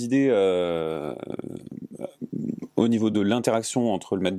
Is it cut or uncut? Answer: uncut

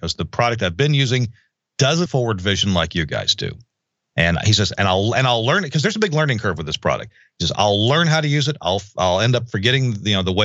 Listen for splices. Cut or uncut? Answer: cut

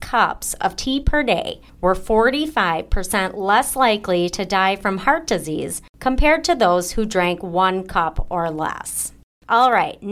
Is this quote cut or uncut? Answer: uncut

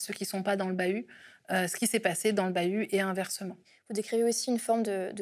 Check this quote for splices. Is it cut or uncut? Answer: uncut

